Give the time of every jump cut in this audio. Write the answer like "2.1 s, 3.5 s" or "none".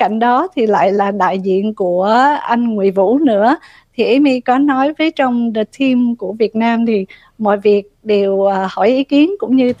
none